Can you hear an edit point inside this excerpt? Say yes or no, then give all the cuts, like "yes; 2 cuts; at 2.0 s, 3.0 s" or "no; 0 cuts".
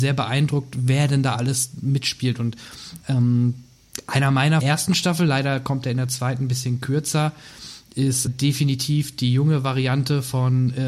yes; 2 cuts; at 4.6 s, 8.3 s